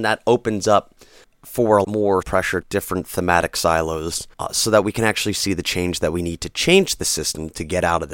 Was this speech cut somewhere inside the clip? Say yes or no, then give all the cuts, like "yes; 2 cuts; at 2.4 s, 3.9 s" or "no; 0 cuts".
yes; 5 cuts; at 1.2 s, 1.8 s, 2.2 s, 2.6 s, 4.3 s